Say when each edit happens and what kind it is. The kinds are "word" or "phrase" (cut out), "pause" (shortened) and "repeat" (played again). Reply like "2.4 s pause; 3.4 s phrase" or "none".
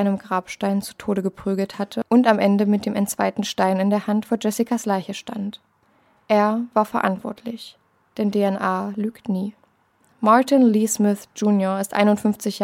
none